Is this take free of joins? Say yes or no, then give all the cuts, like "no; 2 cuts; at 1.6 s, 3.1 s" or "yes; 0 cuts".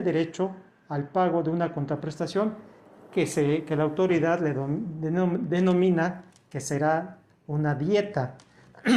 yes; 0 cuts